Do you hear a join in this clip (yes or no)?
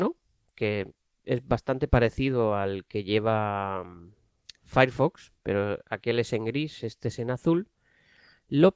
no